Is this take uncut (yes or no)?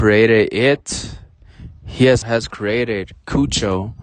no